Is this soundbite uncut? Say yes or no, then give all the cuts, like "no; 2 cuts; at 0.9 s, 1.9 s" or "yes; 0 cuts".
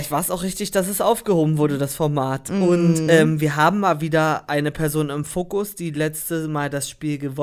yes; 0 cuts